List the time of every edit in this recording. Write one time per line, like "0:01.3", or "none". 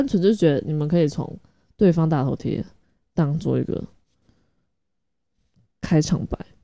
none